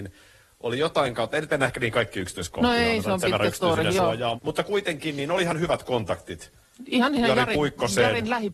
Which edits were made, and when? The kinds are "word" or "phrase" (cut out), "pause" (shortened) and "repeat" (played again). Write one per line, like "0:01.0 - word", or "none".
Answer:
0:04.4 - word